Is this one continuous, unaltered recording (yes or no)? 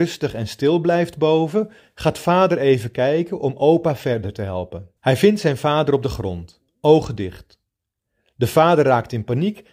no